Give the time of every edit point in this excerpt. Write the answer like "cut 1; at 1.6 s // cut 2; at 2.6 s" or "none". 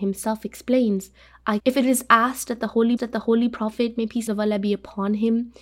cut 1; at 1.6 s // cut 2; at 3.0 s // cut 3; at 4.3 s